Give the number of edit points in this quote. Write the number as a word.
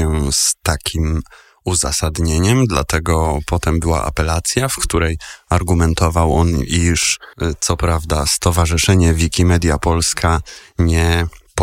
zero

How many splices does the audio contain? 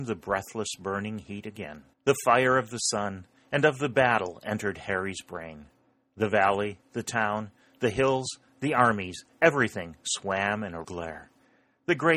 two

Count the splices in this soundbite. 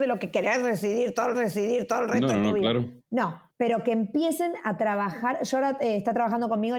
two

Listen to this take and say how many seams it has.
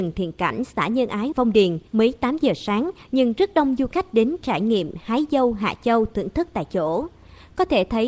two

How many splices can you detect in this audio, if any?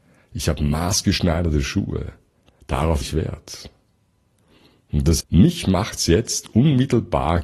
two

